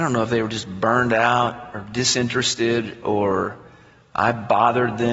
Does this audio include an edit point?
no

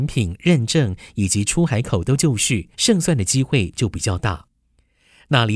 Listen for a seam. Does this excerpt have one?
yes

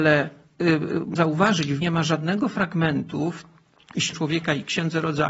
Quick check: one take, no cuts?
no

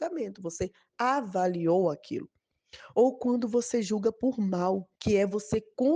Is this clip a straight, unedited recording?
no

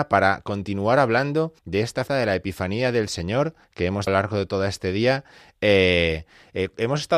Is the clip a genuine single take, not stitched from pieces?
no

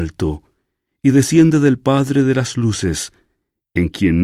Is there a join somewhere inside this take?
no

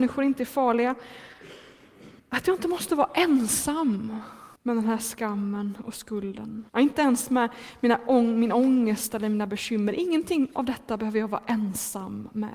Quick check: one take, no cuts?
no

